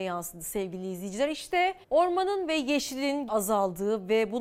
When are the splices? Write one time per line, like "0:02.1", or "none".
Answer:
0:01.8
0:03.3